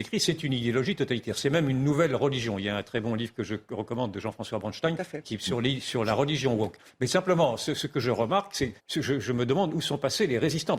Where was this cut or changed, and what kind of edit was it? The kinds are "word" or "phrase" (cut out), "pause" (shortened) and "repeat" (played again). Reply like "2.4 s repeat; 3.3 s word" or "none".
8.8 s pause